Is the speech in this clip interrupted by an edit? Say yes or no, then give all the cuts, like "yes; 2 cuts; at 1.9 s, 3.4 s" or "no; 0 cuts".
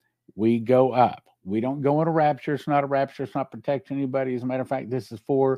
no; 0 cuts